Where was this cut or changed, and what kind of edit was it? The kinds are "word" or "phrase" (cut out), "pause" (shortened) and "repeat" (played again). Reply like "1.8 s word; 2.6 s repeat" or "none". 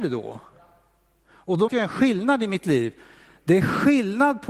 1.7 s word; 2.6 s word